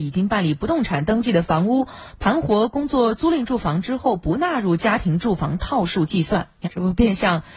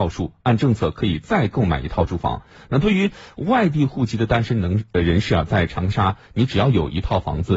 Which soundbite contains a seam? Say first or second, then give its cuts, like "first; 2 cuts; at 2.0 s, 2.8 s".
first; 1 cut; at 6.6 s